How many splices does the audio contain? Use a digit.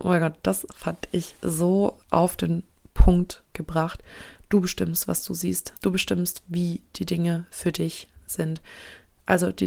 3